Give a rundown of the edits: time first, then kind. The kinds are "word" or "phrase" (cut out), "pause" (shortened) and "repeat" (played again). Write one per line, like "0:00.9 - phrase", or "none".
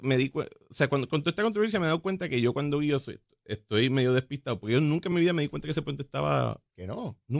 none